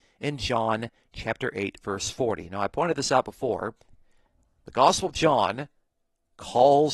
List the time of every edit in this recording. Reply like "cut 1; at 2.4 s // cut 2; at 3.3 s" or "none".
none